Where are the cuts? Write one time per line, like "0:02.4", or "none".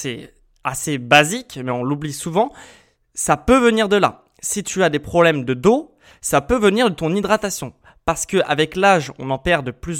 none

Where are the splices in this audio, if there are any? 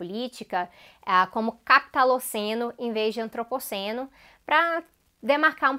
none

